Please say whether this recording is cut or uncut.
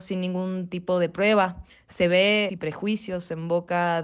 cut